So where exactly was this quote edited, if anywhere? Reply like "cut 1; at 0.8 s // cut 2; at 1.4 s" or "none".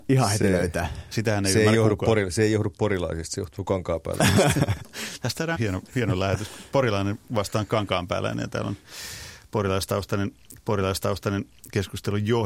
cut 1; at 5.5 s // cut 2; at 10.6 s